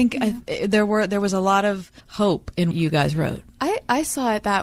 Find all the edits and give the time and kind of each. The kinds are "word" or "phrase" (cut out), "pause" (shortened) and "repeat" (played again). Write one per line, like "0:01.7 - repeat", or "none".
0:02.0 - pause
0:02.7 - word